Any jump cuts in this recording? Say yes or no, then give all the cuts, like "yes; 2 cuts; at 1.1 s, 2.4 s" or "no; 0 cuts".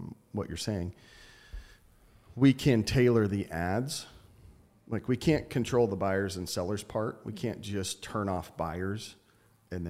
no; 0 cuts